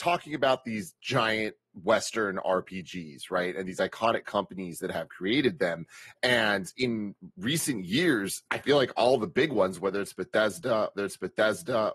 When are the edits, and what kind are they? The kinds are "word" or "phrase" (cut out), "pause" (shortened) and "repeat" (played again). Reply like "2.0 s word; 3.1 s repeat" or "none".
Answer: 7.3 s pause; 8.5 s pause; 10.9 s repeat